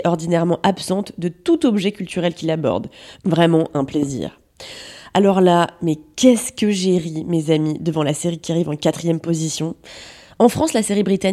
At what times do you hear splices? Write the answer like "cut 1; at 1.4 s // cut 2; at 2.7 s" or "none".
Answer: none